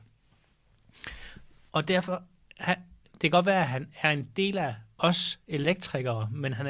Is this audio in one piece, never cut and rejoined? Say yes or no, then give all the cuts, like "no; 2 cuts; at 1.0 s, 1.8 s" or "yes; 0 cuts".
yes; 0 cuts